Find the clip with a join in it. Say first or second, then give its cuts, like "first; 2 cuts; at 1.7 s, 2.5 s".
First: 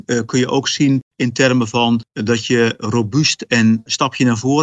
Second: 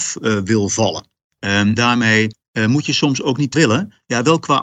second; 2 cuts; at 1.8 s, 3.5 s